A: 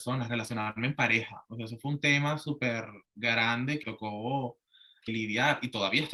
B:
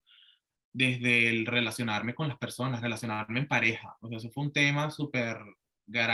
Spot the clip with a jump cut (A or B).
A